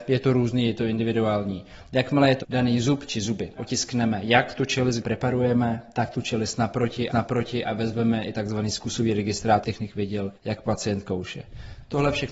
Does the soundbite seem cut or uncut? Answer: cut